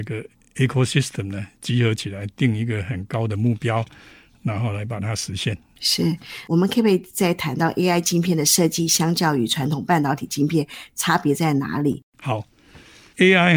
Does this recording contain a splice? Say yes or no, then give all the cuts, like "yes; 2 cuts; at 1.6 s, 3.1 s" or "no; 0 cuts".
no; 0 cuts